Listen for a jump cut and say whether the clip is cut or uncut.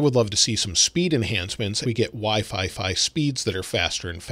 cut